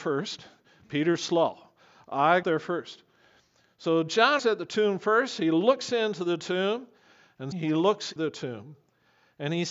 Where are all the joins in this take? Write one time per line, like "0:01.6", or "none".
0:02.4
0:04.4
0:07.5
0:08.2